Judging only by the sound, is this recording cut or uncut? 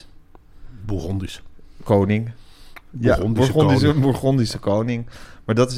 uncut